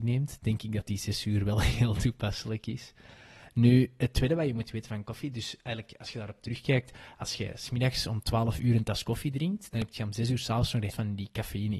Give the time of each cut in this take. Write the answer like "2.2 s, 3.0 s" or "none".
10.9 s